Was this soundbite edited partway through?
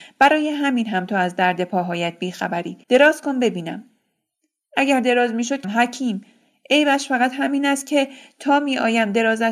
yes; 2 cuts; at 2.8 s, 5.6 s

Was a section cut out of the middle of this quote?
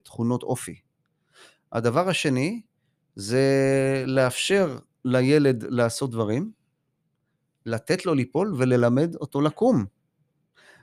no; 0 cuts

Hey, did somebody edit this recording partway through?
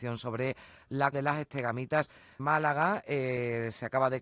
yes; 2 cuts; at 1.1 s, 2.4 s

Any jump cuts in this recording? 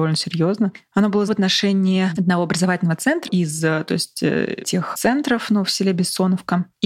yes; 4 cuts; at 1.3 s, 2.2 s, 3.3 s, 4.9 s

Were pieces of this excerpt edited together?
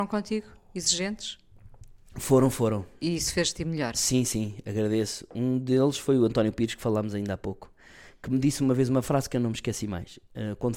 no; 0 cuts

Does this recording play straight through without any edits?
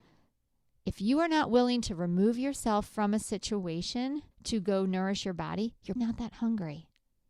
no; 2 cuts; at 4.3 s, 6.0 s

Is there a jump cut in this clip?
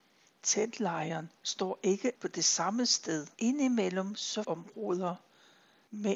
yes; 4 cuts; at 1.4 s, 2.2 s, 3.3 s, 4.4 s

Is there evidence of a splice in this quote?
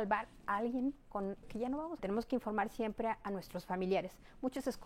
yes; 2 cuts; at 1.4 s, 2.0 s

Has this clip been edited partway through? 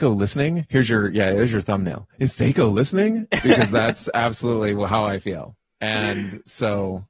no; 0 cuts

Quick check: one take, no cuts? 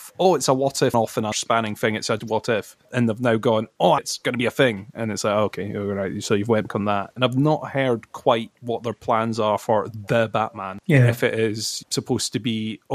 no; 7 cuts; at 0.9 s, 1.3 s, 2.2 s, 2.8 s, 4.0 s, 6.7 s, 8.5 s

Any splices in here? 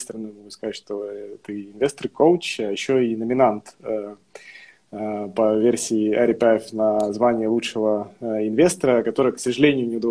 no; 0 cuts

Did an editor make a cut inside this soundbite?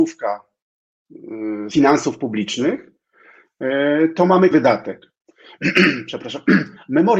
yes; 2 cuts; at 1.7 s, 4.5 s

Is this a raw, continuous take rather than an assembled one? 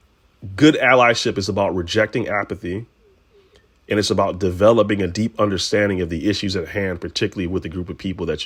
yes; 0 cuts

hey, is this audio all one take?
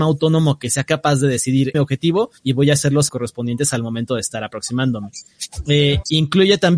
no; 3 cuts; at 1.7 s, 2.4 s, 3.1 s

